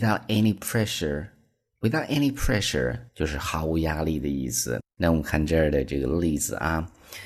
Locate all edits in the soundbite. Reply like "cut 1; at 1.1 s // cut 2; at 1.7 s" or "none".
cut 1; at 3.1 s // cut 2; at 4.9 s